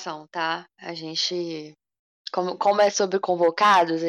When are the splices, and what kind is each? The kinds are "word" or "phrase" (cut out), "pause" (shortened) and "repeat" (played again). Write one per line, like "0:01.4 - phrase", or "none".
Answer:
none